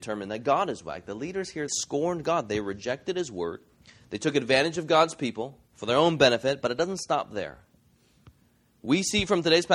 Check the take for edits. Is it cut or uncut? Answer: cut